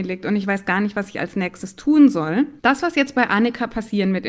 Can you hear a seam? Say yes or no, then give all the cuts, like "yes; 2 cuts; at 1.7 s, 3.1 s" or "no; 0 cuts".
yes; 1 cut; at 2.6 s